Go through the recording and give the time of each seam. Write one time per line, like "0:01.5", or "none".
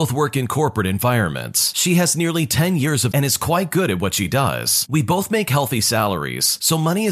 0:03.1

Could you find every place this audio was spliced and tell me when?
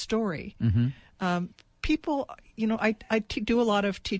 none

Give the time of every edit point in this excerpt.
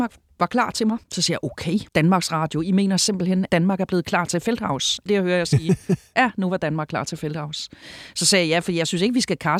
0:01.0
0:01.9
0:03.5
0:05.1

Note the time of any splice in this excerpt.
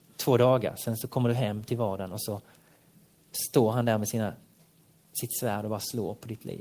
none

